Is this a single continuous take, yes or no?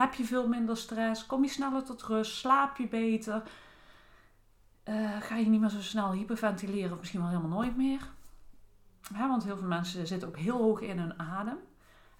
yes